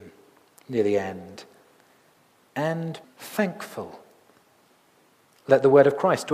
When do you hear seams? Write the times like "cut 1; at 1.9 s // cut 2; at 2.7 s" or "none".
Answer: cut 1; at 3.0 s